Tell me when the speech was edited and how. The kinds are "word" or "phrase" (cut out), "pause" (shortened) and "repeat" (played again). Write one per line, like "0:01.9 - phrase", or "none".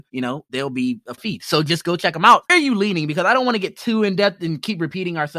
0:01.2 - phrase
0:02.5 - phrase